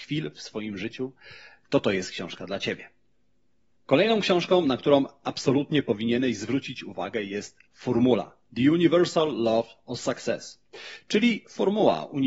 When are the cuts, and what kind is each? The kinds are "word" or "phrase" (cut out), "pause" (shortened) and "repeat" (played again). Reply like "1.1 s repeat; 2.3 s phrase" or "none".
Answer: none